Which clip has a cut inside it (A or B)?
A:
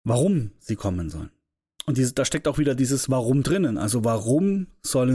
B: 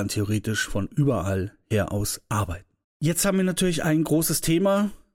B